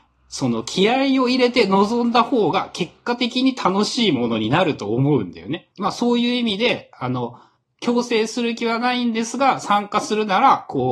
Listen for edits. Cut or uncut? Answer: cut